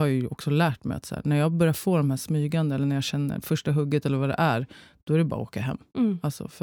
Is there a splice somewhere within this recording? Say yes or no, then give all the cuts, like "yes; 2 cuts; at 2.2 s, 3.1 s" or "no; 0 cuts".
no; 0 cuts